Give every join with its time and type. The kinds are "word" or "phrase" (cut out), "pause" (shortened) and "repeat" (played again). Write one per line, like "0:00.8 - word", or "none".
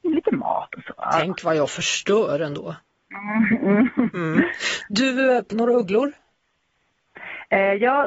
0:04.1 - word
0:05.5 - word

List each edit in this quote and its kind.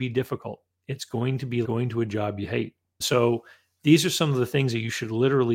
0:01.6 - word
0:03.0 - word

